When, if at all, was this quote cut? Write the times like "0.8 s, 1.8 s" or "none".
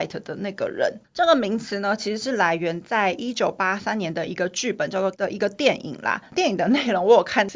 5.1 s